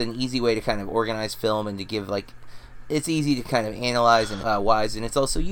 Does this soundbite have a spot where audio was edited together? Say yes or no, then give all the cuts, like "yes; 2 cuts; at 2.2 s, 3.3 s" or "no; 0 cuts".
yes; 1 cut; at 4.4 s